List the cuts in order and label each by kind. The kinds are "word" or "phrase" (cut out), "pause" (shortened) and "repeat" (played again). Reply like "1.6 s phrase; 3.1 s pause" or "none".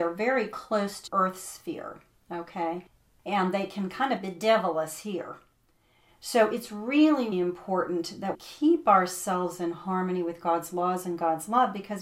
1.1 s word; 7.3 s word; 8.3 s word

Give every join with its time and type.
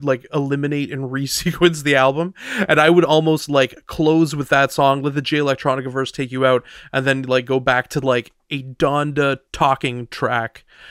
8.4 s pause; 9.4 s pause

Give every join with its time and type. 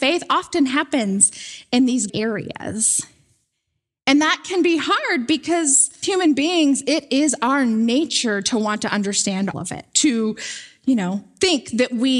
2.1 s word; 6.0 s word; 9.5 s word

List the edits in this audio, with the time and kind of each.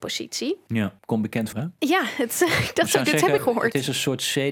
1.0 s pause; 1.5 s word; 3.4 s phrase

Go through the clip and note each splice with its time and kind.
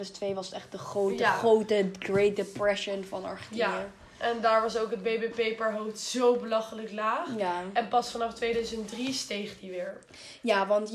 none

